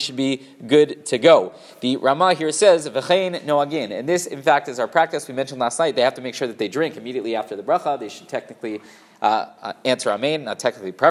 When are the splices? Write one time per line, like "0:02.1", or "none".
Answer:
none